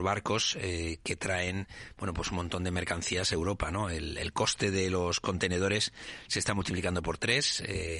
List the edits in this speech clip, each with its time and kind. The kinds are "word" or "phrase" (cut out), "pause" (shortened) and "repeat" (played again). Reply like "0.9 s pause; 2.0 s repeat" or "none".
none